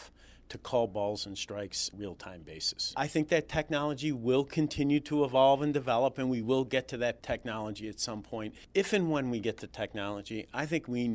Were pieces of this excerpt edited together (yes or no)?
yes